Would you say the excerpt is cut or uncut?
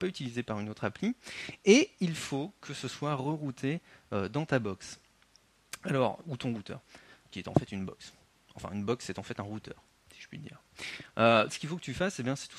cut